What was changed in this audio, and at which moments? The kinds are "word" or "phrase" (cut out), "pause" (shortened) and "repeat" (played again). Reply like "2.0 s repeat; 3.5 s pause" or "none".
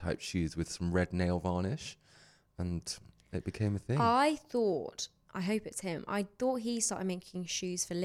none